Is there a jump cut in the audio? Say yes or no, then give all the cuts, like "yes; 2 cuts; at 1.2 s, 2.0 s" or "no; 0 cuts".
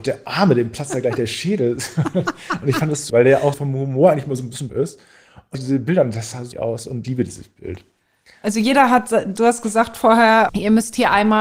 yes; 8 cuts; at 3.1 s, 3.5 s, 4.7 s, 5.5 s, 6.5 s, 7.0 s, 9.4 s, 10.5 s